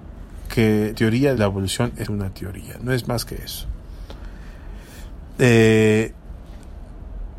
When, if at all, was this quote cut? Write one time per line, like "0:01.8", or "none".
0:00.9
0:01.4
0:02.0